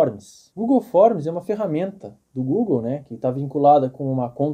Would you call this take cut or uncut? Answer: uncut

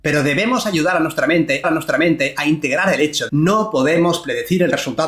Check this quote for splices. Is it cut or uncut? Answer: cut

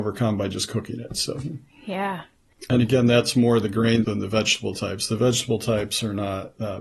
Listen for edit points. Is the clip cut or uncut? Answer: cut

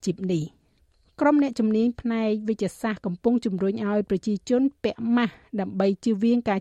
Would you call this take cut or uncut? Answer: cut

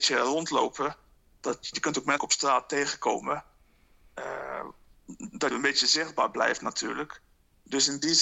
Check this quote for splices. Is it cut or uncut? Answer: cut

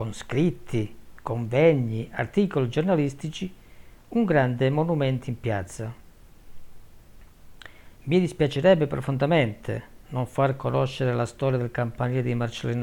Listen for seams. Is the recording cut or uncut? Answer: uncut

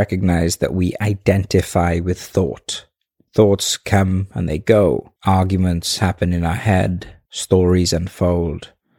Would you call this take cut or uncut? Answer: uncut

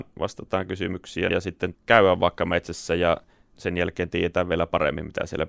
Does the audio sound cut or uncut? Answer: cut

